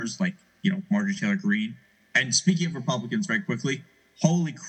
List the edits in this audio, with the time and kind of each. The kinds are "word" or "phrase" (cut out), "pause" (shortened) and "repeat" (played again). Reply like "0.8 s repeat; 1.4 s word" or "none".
none

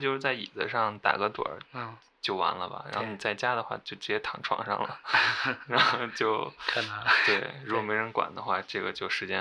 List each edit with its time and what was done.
none

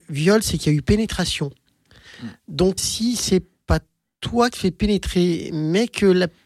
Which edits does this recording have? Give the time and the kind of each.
2.8 s word; 4.5 s word

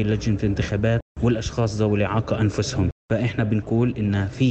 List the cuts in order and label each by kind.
none

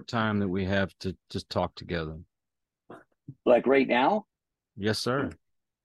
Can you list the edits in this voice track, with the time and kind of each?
1.2 s pause; 3.4 s pause

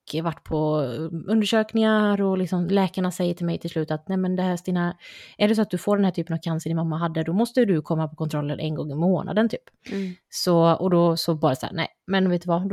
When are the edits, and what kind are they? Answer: 9.8 s pause

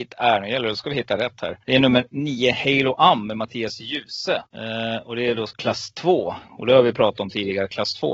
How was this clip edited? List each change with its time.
1.6 s pause; 4.5 s pause; 5.5 s phrase

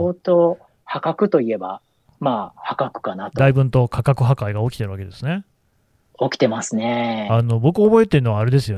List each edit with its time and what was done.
none

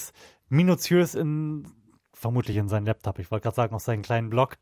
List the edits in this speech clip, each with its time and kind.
none

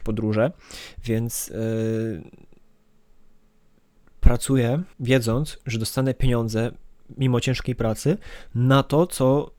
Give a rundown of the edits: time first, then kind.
4.9 s pause

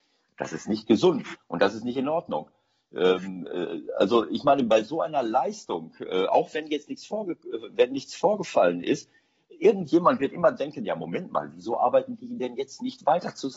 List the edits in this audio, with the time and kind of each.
none

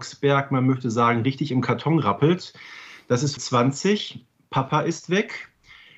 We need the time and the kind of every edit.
3.4 s word

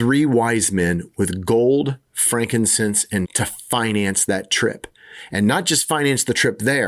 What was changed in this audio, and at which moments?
3.2 s word

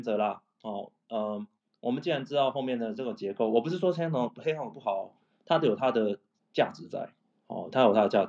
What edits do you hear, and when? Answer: none

